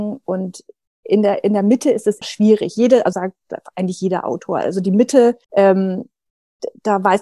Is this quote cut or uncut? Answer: cut